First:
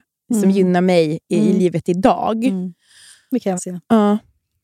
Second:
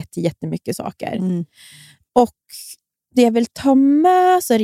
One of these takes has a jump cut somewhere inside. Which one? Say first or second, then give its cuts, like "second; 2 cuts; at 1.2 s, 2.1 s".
first; 1 cut; at 3.6 s